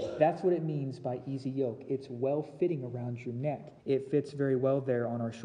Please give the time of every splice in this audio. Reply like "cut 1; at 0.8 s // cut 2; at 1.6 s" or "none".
cut 1; at 3.8 s